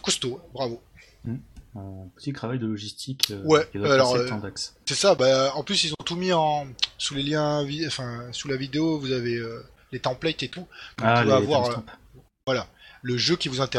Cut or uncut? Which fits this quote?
uncut